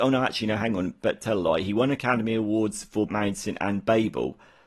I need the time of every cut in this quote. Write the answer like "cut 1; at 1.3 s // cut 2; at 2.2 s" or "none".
cut 1; at 3.1 s